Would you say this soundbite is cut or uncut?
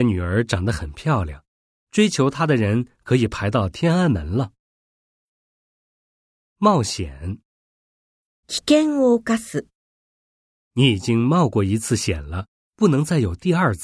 uncut